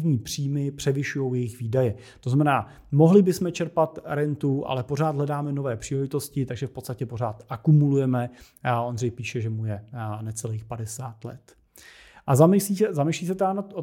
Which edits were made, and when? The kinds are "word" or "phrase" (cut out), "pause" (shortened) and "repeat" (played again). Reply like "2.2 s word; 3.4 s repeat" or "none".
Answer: none